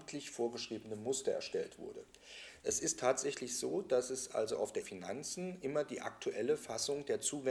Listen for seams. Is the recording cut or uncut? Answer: cut